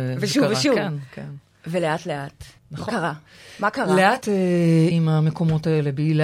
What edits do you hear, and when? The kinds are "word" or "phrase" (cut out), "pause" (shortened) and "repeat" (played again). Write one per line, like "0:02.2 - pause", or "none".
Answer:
0:02.6 - pause
0:04.2 - word
0:04.9 - word